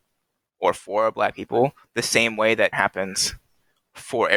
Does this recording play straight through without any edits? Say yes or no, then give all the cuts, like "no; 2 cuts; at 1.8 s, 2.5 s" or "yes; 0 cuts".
no; 1 cut; at 2.7 s